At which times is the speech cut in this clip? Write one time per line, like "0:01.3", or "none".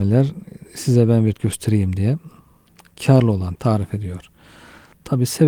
0:01.3
0:03.6